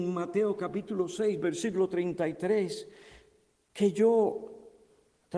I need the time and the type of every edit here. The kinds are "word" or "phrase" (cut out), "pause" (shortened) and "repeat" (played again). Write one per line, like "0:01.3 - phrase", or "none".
none